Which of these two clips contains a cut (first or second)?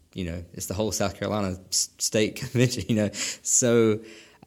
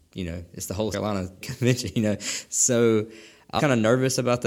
second